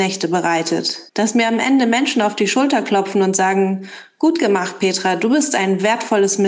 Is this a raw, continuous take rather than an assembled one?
no; 1 cut; at 1.1 s

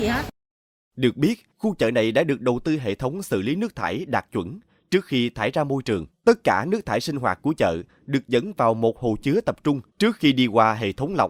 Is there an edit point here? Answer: yes; 3 cuts; at 1.5 s, 6.1 s, 9.9 s

